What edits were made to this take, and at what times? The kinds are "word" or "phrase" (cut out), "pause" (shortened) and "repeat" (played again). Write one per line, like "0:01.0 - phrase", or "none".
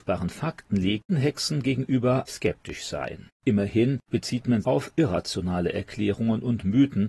0:01.1 - word
0:02.3 - word
0:03.3 - pause
0:04.6 - phrase

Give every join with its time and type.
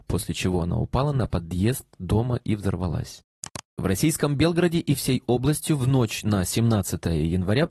none

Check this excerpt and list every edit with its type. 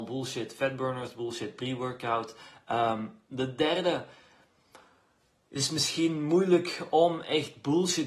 none

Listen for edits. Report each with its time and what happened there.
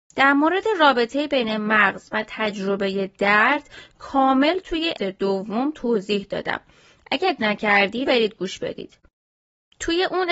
0:05.0 - word
0:07.4 - word
0:08.1 - word

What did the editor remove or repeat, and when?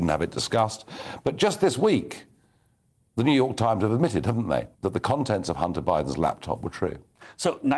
0:04.7 - pause

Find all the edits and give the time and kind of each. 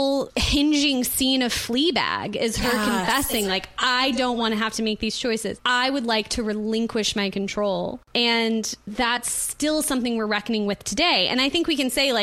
none

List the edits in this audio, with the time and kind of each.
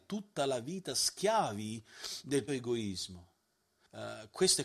0:02.5 - word

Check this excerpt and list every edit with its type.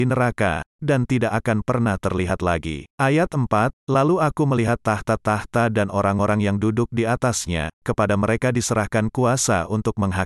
0:02.9 - pause
0:03.8 - pause
0:07.7 - pause

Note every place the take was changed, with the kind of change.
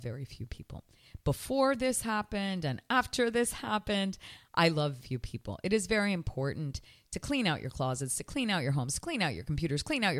0:05.0 - word

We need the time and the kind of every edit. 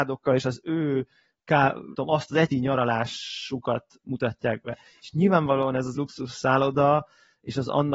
0:01.9 - word
0:02.5 - word
0:05.9 - word

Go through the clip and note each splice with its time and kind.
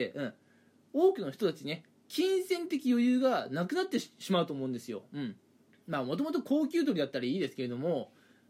0:05.6 - pause

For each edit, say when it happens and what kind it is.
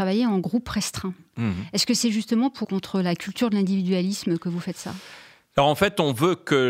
0:02.6 - word

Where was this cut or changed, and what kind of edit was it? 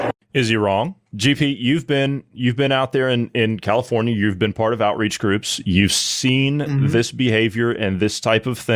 none

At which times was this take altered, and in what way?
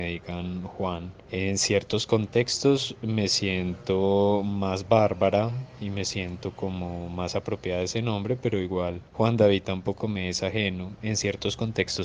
0:01.2 - pause
0:09.1 - pause

